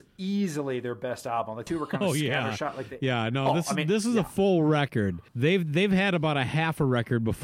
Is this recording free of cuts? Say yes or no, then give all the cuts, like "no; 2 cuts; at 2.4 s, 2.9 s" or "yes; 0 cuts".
no; 2 cuts; at 1.7 s, 5.3 s